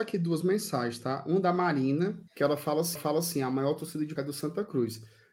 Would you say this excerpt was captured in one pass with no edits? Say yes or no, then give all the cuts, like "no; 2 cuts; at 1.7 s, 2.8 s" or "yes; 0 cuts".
no; 3 cuts; at 2.3 s, 3.0 s, 4.2 s